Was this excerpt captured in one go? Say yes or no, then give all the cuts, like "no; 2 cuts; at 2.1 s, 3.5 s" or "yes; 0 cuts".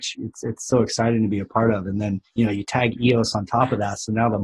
yes; 0 cuts